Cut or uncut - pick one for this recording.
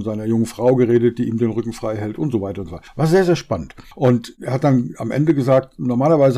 uncut